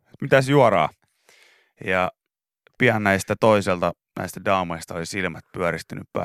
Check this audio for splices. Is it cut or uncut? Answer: uncut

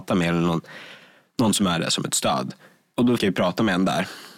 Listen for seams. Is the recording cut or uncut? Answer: cut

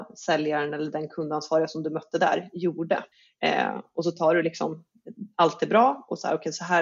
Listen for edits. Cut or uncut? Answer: cut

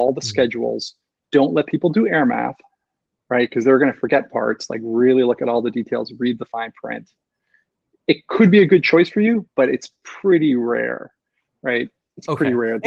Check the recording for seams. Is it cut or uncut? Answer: uncut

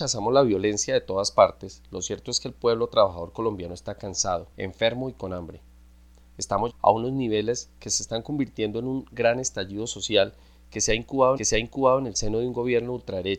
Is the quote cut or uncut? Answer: cut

